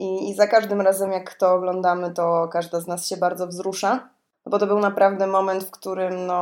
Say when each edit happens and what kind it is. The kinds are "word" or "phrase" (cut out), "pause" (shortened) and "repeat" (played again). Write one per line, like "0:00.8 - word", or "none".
none